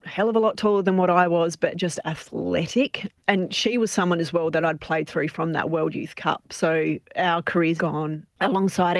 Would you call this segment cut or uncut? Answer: cut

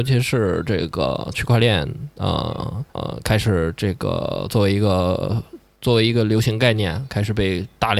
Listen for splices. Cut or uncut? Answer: cut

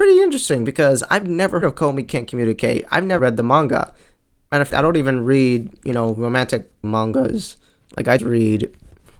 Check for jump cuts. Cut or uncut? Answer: cut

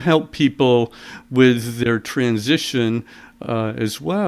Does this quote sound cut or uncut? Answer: uncut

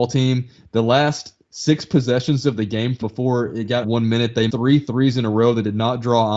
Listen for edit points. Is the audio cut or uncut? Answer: cut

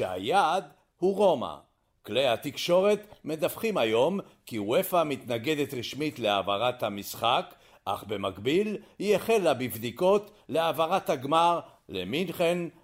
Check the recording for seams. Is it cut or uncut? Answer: uncut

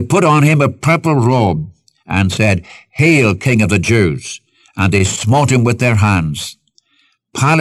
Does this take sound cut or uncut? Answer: uncut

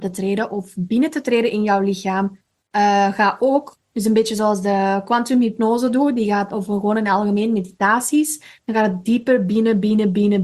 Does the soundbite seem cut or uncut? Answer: uncut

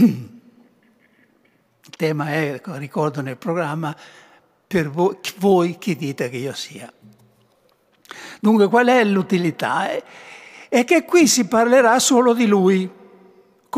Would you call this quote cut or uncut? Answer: uncut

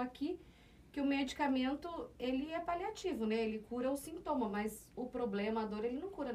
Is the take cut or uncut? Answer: uncut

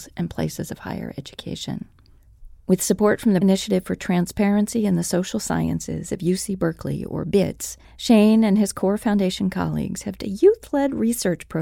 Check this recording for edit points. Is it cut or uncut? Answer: cut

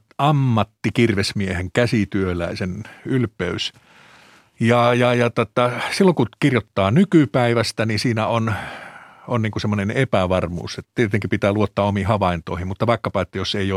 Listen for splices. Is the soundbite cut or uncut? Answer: uncut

